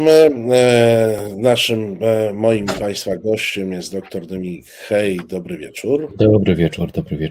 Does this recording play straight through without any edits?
yes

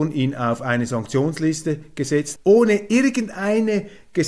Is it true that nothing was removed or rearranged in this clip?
no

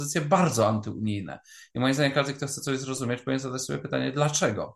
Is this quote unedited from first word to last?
yes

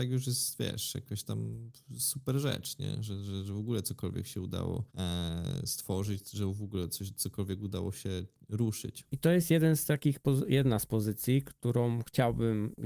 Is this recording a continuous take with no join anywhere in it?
no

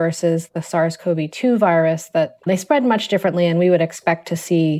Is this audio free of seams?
no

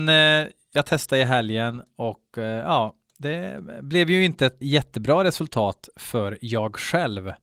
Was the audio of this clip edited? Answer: yes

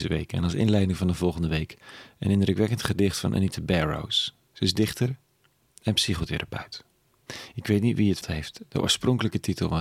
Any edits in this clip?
yes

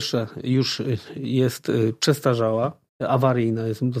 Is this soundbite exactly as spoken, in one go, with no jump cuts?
no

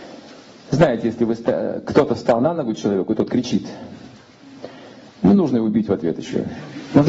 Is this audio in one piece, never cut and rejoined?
yes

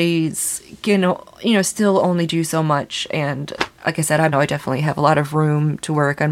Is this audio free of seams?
no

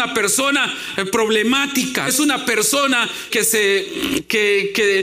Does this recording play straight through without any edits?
no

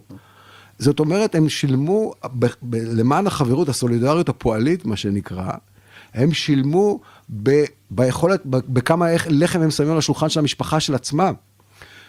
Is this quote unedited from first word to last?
yes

